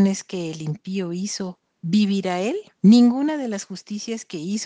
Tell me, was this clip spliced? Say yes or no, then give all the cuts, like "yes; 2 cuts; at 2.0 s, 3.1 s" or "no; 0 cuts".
yes; 2 cuts; at 1.7 s, 2.7 s